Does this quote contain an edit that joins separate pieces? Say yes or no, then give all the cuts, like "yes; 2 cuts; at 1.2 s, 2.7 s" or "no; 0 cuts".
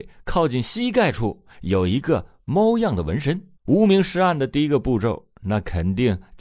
yes; 1 cut; at 3.6 s